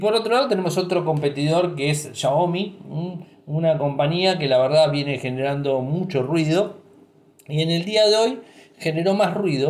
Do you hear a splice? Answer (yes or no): no